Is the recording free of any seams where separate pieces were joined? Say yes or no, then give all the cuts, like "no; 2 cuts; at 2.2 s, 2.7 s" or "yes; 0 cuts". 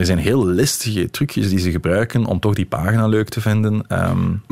yes; 0 cuts